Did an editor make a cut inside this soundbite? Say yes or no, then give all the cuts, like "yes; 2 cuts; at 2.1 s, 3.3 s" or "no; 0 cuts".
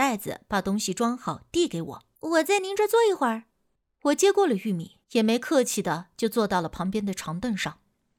yes; 3 cuts; at 2.2 s, 3.8 s, 5.0 s